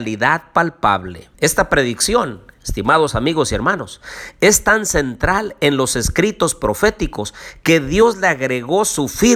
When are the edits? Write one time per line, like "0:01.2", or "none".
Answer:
0:01.3